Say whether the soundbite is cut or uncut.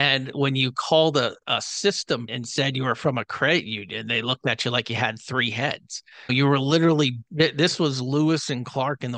cut